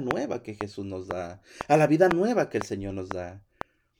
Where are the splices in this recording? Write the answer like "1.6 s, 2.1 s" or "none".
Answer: none